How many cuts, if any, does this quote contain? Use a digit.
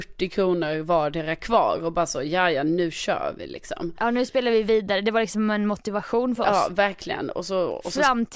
0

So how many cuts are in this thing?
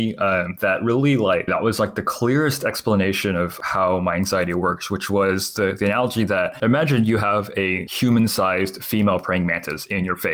1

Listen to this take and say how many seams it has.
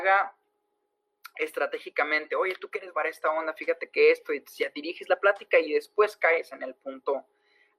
1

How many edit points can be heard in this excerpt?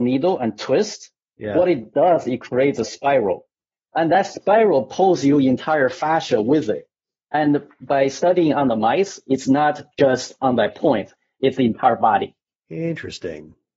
0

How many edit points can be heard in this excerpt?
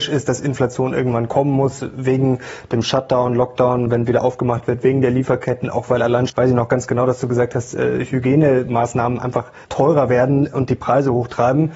2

